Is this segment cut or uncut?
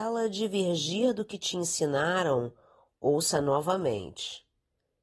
uncut